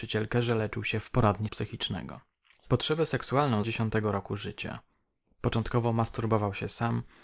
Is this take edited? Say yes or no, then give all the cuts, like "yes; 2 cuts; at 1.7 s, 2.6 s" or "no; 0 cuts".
yes; 3 cuts; at 1.5 s, 2.5 s, 3.6 s